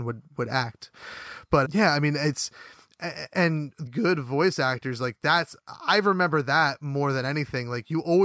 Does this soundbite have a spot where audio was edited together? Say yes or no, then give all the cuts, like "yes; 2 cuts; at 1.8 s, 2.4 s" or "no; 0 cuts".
yes; 2 cuts; at 1.6 s, 3.9 s